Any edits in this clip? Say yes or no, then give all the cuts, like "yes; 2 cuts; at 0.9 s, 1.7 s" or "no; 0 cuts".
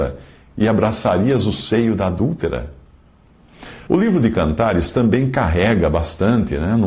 yes; 1 cut; at 3.9 s